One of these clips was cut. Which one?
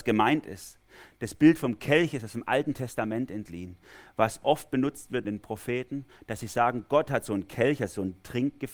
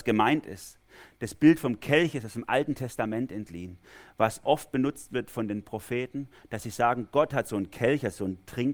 first; 1 cut; at 5.2 s

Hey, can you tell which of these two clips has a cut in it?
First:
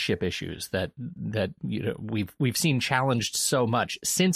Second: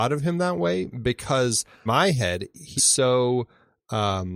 second; 2 cuts; at 1.9 s, 2.8 s

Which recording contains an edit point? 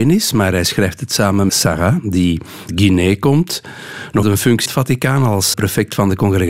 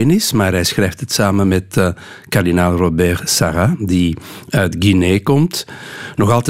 first; 5 cuts; at 1.5 s, 2.7 s, 4.2 s, 4.7 s, 5.5 s

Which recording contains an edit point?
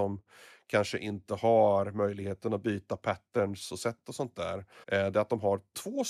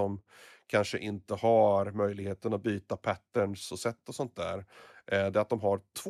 first; 1 cut; at 4.8 s

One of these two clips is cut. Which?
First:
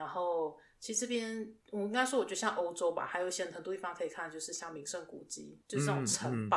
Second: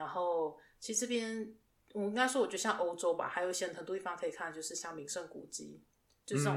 first; 2 cuts; at 1.6 s, 5.6 s

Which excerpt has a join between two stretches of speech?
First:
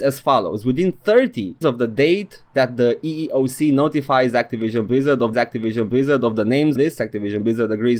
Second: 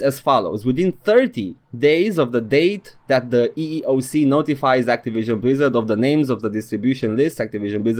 first; 3 cuts; at 1.6 s, 5.3 s, 6.8 s

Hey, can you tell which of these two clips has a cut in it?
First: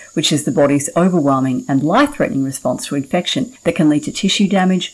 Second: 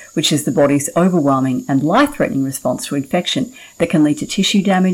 first; 1 cut; at 3.6 s

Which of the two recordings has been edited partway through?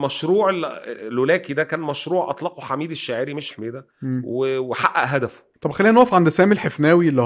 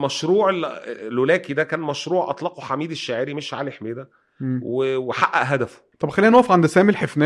first; 2 cuts; at 3.5 s, 3.9 s

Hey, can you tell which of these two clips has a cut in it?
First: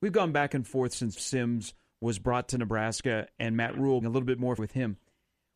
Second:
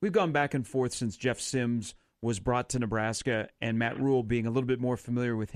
first; 3 cuts; at 1.2 s, 4.0 s, 4.6 s

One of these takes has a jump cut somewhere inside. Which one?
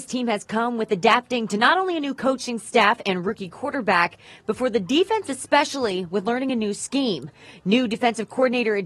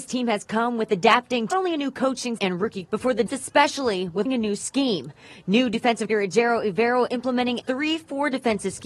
second; 7 cuts; at 1.5 s, 2.4 s, 2.9 s, 3.3 s, 4.3 s, 6.1 s, 7.6 s

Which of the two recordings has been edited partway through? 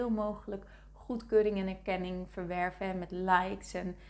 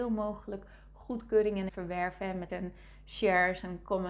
second; 2 cuts; at 1.7 s, 2.5 s

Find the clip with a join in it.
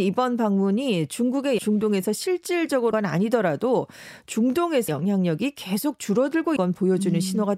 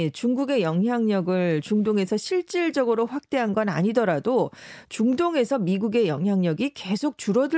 first; 4 cuts; at 1.6 s, 2.9 s, 4.9 s, 6.6 s

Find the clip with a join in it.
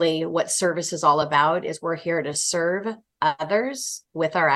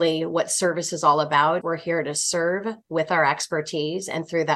second; 2 cuts; at 1.6 s, 2.8 s

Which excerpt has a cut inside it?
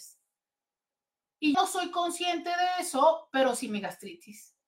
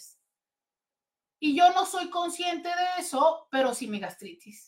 first; 1 cut; at 1.5 s

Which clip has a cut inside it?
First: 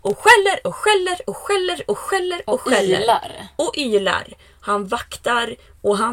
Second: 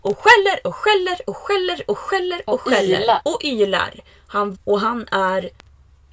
second; 2 cuts; at 3.2 s, 4.5 s

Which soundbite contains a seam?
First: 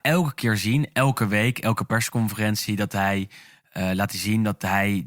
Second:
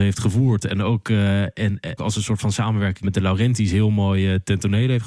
second; 2 cuts; at 2.0 s, 3.0 s

